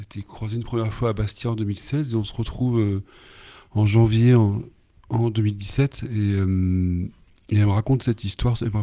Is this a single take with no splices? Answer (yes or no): yes